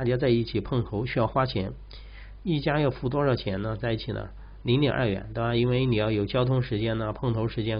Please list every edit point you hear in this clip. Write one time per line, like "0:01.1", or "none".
none